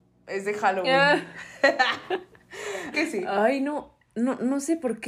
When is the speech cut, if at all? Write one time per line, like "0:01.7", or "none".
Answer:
0:02.9
0:04.0